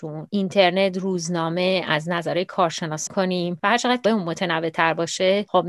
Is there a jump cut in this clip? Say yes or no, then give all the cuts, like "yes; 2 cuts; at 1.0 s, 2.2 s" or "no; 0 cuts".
yes; 2 cuts; at 3.1 s, 4.0 s